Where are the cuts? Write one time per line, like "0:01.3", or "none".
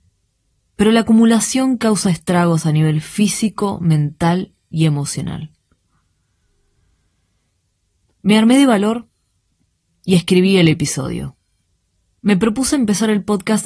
none